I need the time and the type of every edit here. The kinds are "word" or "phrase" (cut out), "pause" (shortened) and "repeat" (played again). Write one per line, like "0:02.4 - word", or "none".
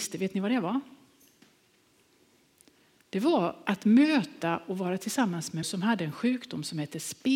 0:05.6 - word